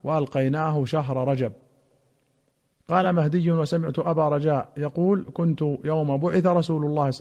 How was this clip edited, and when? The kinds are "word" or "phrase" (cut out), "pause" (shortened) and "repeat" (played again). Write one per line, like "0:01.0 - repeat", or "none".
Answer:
none